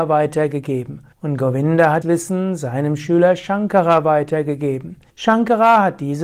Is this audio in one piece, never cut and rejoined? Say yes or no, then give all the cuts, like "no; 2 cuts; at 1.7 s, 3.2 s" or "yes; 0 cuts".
no; 3 cuts; at 1.1 s, 2.0 s, 5.1 s